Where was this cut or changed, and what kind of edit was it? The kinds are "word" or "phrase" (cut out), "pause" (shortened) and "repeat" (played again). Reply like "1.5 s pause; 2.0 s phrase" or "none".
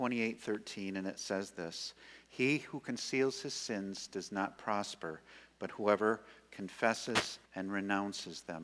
7.5 s pause